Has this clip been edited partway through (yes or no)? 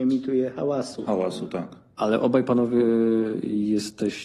no